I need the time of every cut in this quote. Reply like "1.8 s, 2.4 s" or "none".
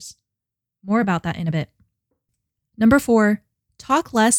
none